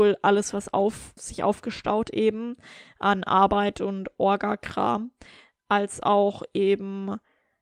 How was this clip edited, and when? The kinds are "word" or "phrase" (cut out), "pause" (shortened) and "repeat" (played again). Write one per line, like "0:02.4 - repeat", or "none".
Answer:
0:01.2 - word
0:02.0 - word